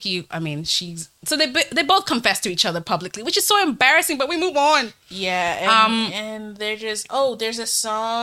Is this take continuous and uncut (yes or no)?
yes